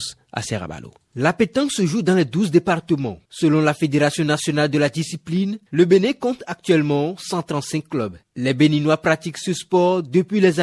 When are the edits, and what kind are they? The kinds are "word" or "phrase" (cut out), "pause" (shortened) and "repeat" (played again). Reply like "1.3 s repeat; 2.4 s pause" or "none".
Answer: none